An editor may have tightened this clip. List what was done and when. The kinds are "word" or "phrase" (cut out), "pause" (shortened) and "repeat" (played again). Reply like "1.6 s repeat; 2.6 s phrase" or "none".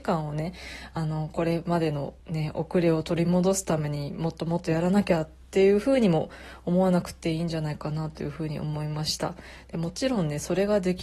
2.2 s pause